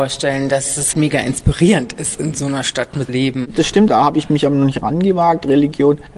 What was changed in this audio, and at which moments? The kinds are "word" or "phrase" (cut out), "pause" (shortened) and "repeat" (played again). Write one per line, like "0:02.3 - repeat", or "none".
0:00.9 - word
0:03.1 - phrase
0:03.9 - word